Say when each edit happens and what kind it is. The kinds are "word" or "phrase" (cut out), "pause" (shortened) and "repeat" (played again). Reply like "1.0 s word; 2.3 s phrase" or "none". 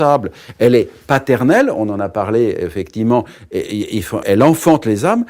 4.2 s word